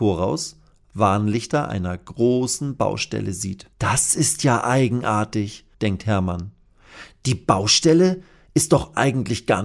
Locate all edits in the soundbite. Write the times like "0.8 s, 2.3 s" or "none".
3.7 s, 5.7 s